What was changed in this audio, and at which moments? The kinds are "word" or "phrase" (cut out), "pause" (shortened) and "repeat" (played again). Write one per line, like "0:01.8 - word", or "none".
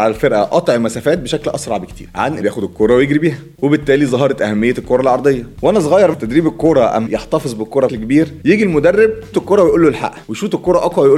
0:02.4 - word
0:06.1 - word
0:07.1 - word
0:07.9 - word
0:09.3 - word